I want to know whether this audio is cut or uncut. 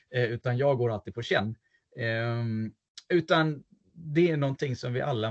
uncut